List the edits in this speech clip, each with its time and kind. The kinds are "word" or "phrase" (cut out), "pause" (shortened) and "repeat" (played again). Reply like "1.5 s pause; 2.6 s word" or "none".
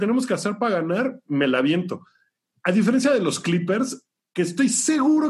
none